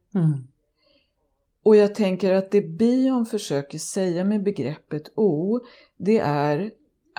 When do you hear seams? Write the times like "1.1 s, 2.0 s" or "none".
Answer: none